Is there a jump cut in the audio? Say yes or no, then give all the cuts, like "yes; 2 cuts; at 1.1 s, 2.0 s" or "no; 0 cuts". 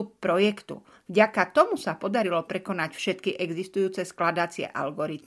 no; 0 cuts